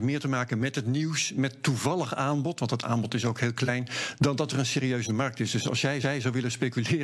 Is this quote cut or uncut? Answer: cut